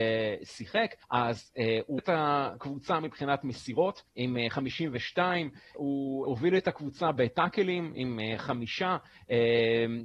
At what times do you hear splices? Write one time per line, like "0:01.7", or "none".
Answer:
0:01.0
0:02.0
0:04.1
0:05.7
0:06.2

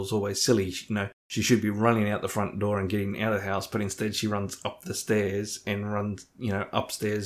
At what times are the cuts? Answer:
0:01.2

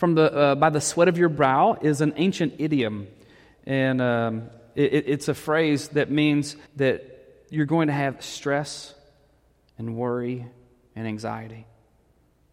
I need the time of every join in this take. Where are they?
0:06.7

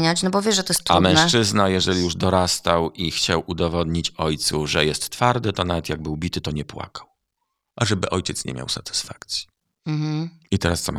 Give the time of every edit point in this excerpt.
none

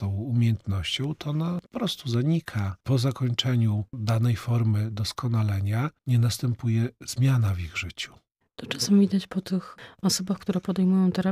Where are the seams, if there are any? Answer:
0:01.7
0:02.8
0:03.9
0:06.0
0:08.4

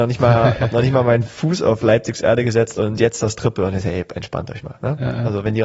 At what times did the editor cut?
none

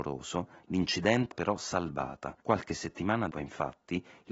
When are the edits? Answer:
0:01.3
0:02.4
0:03.3

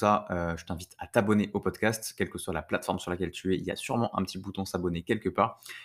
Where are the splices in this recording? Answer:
none

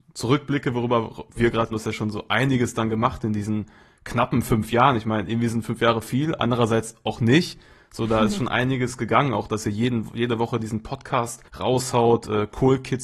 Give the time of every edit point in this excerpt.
0:01.4
0:01.7
0:11.5

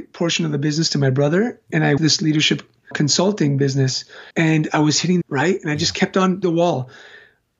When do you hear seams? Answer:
0:02.0
0:02.9
0:04.3
0:05.2
0:06.4

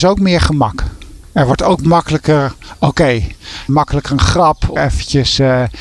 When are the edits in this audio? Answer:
0:03.7
0:04.8

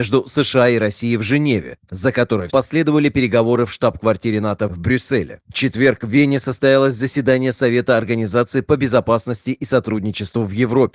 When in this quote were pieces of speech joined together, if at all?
0:02.5

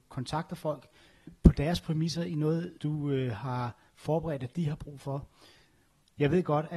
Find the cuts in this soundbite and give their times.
0:02.8

